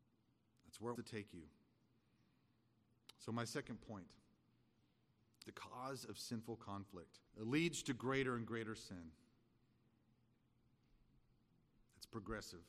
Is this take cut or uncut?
cut